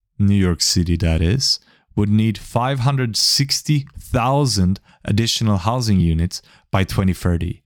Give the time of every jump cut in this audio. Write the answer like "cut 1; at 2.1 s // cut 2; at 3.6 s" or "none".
none